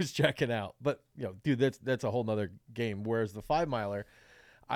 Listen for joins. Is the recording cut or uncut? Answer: cut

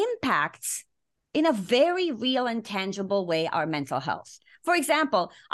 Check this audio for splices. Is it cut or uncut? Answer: uncut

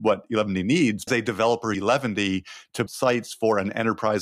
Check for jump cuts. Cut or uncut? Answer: cut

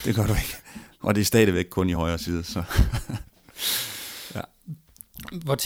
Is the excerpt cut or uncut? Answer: uncut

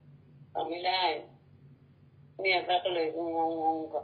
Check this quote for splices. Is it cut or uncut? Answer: uncut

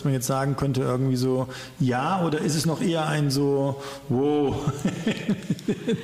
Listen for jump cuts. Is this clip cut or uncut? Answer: uncut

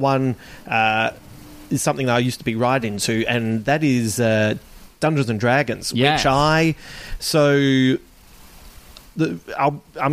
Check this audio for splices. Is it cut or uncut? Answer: uncut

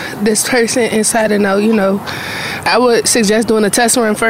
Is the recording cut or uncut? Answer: uncut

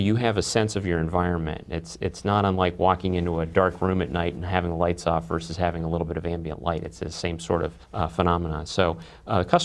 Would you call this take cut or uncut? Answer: cut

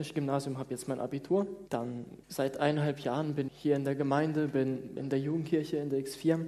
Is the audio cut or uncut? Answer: cut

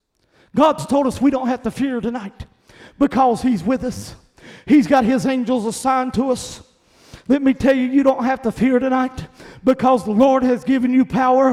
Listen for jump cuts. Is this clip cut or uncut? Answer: uncut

